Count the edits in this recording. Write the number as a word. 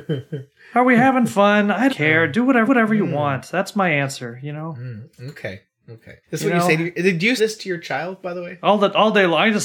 four